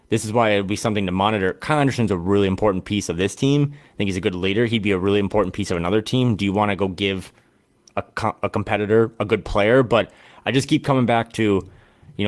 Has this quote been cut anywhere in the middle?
no; 0 cuts

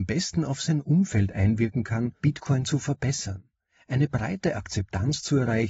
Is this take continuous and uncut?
no; 1 cut; at 2.2 s

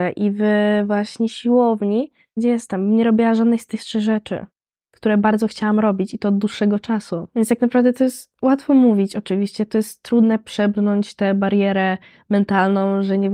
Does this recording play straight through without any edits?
no; 1 cut; at 2.4 s

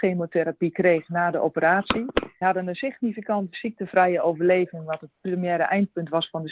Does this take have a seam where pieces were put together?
yes; 2 cuts; at 2.4 s, 3.5 s

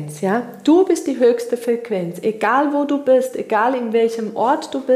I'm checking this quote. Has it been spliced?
no; 0 cuts

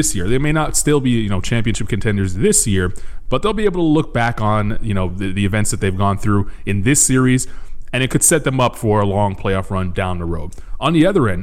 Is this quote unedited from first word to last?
yes; 0 cuts

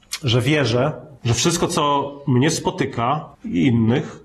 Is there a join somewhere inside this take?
yes; 2 cuts; at 1.2 s, 3.3 s

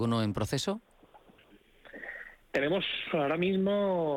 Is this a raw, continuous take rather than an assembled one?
yes; 0 cuts

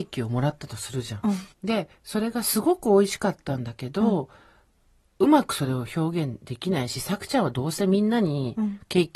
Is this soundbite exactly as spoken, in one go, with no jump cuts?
no; 1 cut; at 1.5 s

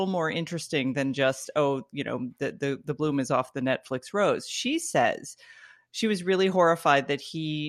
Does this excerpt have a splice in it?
no; 0 cuts

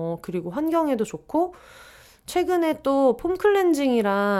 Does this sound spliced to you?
no; 0 cuts

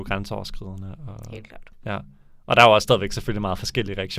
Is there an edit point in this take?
no; 0 cuts

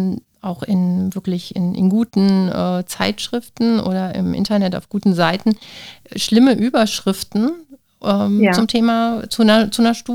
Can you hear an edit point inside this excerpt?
no; 0 cuts

